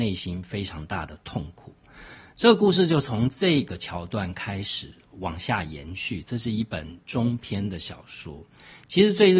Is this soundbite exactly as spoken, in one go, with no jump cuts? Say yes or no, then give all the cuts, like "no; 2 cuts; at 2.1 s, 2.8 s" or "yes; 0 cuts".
yes; 0 cuts